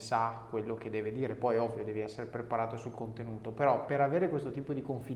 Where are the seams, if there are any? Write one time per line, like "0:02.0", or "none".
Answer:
none